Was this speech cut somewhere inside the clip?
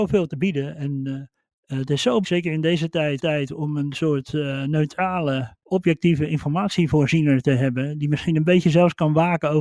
yes; 4 cuts; at 1.4 s, 2.2 s, 3.2 s, 5.6 s

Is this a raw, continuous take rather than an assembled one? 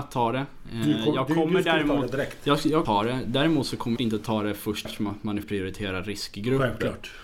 no; 4 cuts; at 2.8 s, 4.0 s, 4.8 s, 5.4 s

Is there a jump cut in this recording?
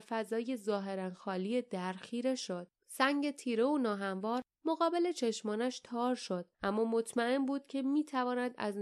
yes; 2 cuts; at 2.8 s, 6.5 s

